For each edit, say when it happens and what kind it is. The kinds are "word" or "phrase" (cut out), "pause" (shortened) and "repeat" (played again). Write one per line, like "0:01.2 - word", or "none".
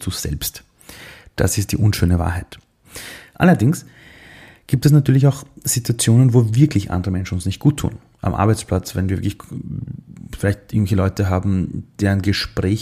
none